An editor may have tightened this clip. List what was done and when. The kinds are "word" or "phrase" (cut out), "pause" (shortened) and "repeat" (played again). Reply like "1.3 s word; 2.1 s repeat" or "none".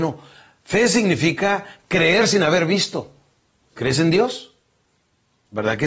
none